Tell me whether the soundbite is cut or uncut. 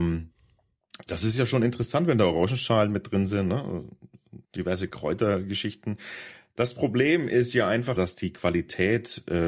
cut